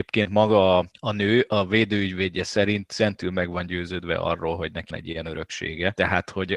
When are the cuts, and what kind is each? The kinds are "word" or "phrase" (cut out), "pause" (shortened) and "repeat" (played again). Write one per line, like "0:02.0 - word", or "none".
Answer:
0:04.9 - word